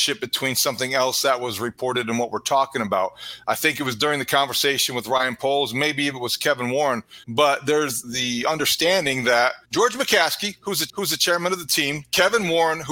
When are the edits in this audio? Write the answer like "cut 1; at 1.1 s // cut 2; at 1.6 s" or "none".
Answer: cut 1; at 7.2 s // cut 2; at 8.0 s // cut 3; at 9.6 s // cut 4; at 10.9 s